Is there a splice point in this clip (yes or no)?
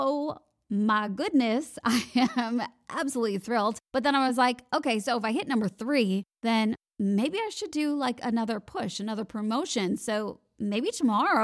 no